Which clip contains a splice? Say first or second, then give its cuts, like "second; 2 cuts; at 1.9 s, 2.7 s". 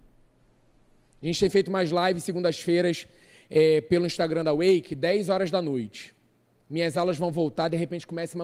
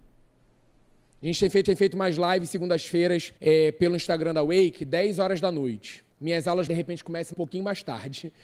second; 5 cuts; at 1.6 s, 3.4 s, 6.1 s, 6.7 s, 7.3 s